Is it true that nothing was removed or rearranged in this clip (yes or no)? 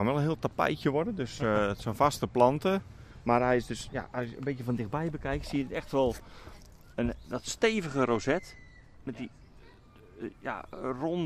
yes